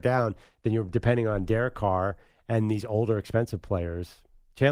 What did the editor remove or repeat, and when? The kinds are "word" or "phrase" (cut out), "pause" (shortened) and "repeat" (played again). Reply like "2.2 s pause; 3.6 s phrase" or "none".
none

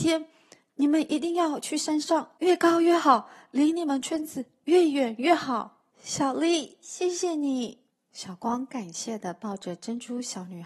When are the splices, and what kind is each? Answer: 2.4 s pause; 5.9 s pause; 7.9 s pause

